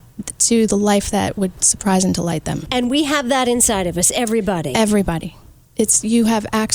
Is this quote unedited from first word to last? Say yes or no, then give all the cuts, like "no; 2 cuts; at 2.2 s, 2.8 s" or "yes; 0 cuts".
yes; 0 cuts